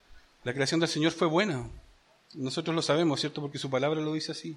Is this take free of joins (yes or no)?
yes